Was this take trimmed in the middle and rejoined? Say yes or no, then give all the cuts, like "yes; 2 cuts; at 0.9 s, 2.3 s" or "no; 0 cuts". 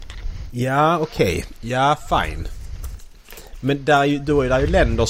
no; 0 cuts